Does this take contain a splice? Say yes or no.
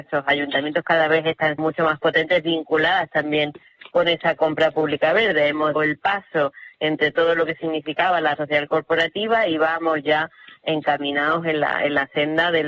yes